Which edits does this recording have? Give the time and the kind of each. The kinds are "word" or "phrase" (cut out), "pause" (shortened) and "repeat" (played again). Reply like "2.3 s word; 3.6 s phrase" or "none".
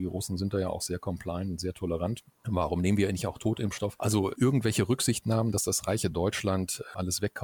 none

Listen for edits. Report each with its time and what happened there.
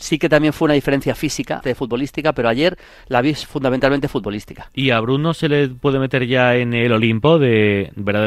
1.6 s word

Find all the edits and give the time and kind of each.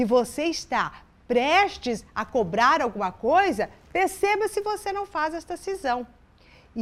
none

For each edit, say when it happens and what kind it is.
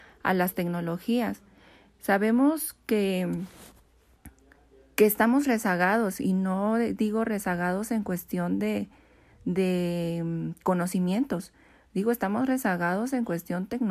none

